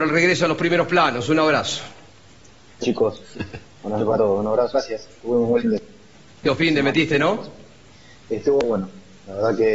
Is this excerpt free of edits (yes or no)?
no